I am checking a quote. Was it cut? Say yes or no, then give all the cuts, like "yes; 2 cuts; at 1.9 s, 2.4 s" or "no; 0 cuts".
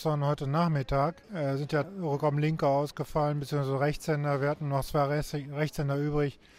yes; 2 cuts; at 1.2 s, 1.8 s